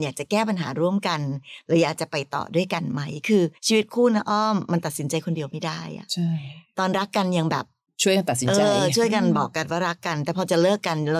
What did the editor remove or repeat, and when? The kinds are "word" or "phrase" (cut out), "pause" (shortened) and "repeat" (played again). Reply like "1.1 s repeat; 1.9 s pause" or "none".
3.6 s pause